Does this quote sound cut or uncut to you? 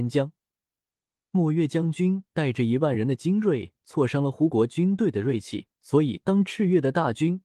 cut